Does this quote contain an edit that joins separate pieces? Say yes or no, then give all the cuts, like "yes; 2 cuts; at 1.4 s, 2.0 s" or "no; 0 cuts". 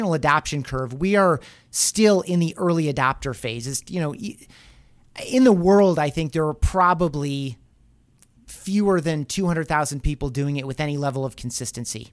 no; 0 cuts